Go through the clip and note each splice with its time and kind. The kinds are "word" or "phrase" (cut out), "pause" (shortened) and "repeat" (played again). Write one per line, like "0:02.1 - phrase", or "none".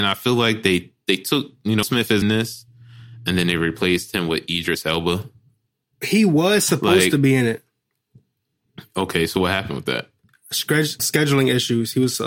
0:01.8 - word
0:02.2 - word
0:11.0 - word